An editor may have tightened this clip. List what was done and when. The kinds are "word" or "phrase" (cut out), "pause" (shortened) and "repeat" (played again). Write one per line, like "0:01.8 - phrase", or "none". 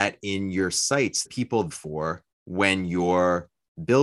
0:01.3 - word
0:01.7 - phrase
0:02.3 - pause